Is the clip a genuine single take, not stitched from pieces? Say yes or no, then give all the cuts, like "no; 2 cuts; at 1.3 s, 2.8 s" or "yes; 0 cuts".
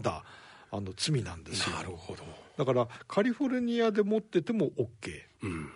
yes; 0 cuts